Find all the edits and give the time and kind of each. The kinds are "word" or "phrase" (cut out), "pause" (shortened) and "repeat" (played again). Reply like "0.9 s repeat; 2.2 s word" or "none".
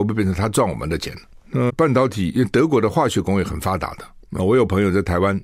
1.7 s word